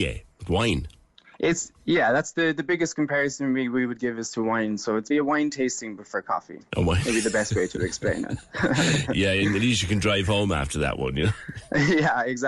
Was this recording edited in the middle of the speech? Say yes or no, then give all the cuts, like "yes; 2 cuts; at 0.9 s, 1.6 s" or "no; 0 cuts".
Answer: yes; 1 cut; at 5.1 s